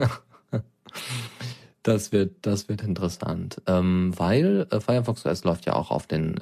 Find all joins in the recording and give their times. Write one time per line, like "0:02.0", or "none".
none